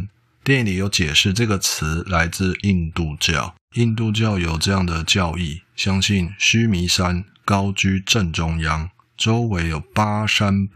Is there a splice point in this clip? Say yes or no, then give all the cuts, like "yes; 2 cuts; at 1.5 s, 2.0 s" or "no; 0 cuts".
yes; 1 cut; at 3.6 s